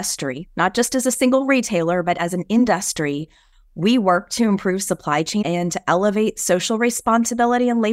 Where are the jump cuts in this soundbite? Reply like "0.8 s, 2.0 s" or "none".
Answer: 5.4 s